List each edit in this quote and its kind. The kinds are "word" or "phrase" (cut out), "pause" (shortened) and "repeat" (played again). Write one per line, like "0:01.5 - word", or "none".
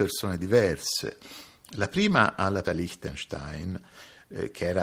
0:02.6 - word